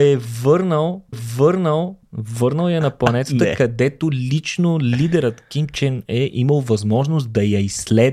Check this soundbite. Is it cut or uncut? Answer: cut